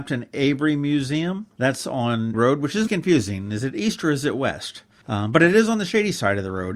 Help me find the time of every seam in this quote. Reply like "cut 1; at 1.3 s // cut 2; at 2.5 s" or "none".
cut 1; at 2.3 s // cut 2; at 2.9 s